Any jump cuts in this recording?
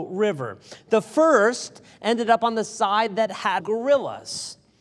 yes; 1 cut; at 3.6 s

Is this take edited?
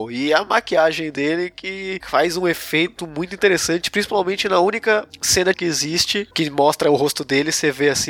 yes; 1 cut; at 5.5 s

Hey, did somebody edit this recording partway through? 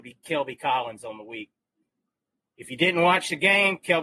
no; 0 cuts

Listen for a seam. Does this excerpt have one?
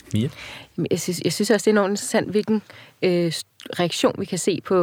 no; 0 cuts

